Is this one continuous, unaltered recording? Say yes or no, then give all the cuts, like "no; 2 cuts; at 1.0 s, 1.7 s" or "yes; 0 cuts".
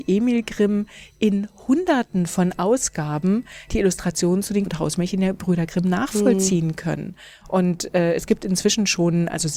no; 1 cut; at 4.7 s